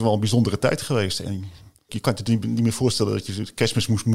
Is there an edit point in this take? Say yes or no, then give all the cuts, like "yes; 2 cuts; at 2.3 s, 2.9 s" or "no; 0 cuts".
no; 0 cuts